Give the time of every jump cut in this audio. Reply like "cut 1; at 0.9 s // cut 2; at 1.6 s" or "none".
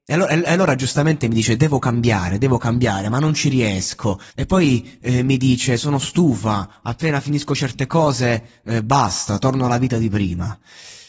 cut 1; at 4.3 s